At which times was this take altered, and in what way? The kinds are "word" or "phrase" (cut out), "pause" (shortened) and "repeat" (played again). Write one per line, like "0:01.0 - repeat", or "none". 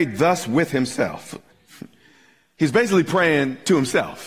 0:01.5 - pause